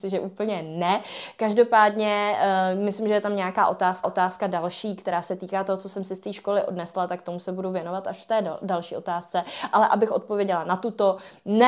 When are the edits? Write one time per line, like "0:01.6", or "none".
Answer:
0:04.0